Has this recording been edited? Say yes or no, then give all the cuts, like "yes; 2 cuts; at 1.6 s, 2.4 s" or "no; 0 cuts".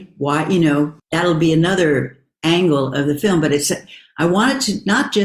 yes; 1 cut; at 1.0 s